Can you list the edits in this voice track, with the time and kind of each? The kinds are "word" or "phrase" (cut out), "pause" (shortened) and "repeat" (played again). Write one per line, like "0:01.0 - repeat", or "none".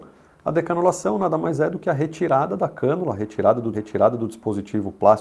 0:03.7 - repeat